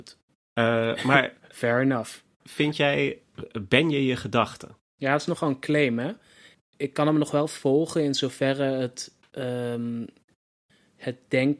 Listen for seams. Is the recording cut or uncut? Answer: uncut